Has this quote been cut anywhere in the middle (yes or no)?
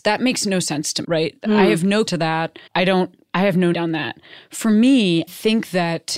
yes